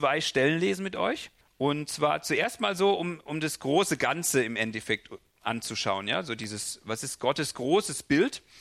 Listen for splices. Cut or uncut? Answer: cut